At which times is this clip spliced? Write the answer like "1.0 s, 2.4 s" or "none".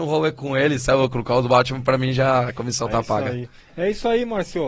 none